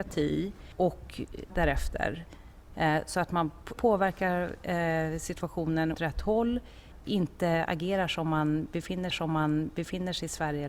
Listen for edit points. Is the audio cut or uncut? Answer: cut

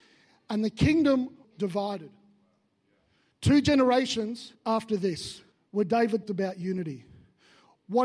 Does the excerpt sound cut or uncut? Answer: cut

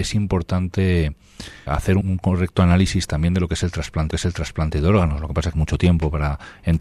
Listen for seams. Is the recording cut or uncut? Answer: cut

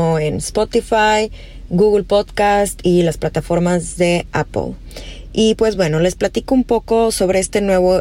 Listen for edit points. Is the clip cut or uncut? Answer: uncut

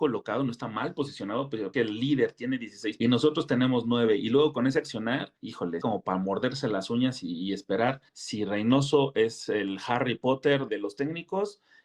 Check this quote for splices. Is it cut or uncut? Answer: cut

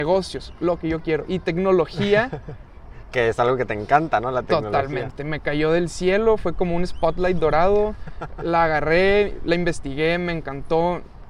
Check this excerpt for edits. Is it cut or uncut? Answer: uncut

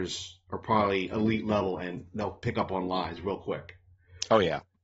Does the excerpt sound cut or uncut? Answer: uncut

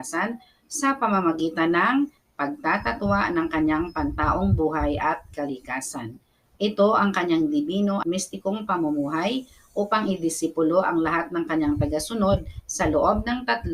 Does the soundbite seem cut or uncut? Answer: cut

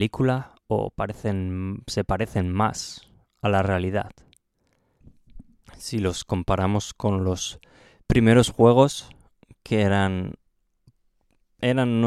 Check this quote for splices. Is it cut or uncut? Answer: uncut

